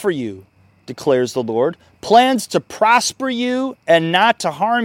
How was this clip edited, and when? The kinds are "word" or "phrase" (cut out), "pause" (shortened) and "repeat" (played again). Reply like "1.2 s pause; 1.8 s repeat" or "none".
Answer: none

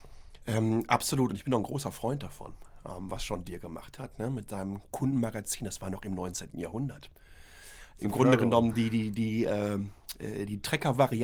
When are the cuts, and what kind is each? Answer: none

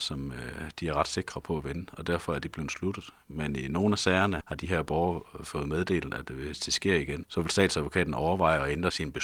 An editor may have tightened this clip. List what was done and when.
4.4 s word

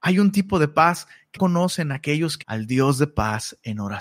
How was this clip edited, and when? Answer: 1.4 s word; 2.4 s word

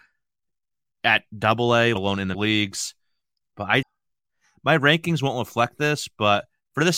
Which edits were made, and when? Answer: 2.0 s word; 2.3 s word; 3.8 s word

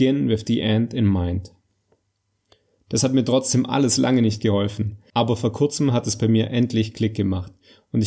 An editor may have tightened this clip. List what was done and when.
none

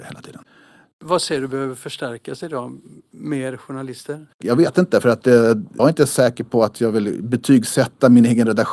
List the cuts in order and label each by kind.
4.3 s pause; 5.8 s word

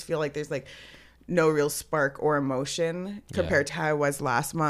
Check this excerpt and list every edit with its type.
3.7 s word

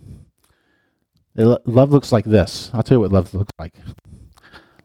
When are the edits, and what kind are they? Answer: none

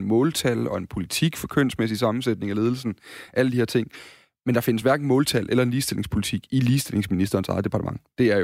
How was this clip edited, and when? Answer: none

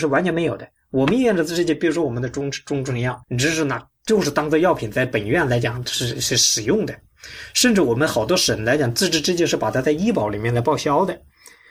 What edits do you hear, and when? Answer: 3.2 s pause

